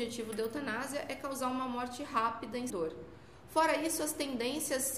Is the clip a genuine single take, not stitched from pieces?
no; 1 cut; at 2.7 s

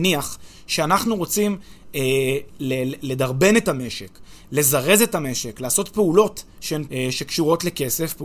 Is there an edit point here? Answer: yes; 1 cut; at 6.9 s

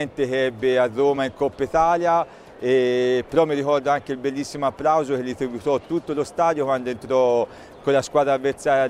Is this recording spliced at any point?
no; 0 cuts

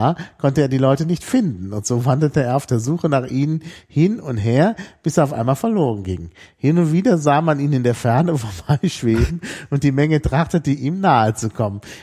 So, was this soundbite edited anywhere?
no; 0 cuts

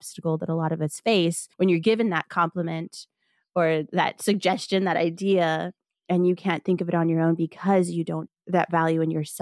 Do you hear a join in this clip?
yes; 2 cuts; at 1.5 s, 8.3 s

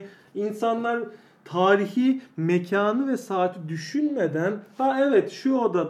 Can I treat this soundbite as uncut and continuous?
yes; 0 cuts

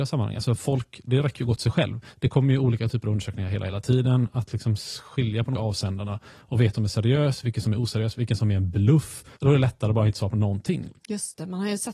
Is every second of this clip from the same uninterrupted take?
no; 5 cuts; at 2.1 s, 5.5 s, 6.7 s, 9.3 s, 11.0 s

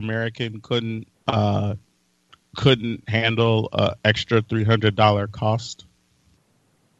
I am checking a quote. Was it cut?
yes; 1 cut; at 1.1 s

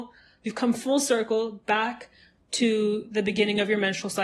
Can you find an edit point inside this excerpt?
no; 0 cuts

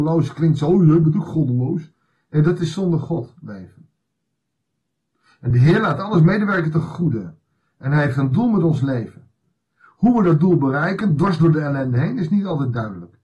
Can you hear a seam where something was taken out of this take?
no; 0 cuts

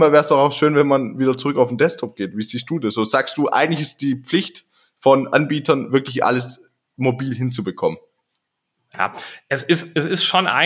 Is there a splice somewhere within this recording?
no; 0 cuts

